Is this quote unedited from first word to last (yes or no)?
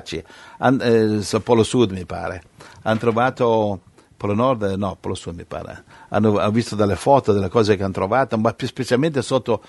yes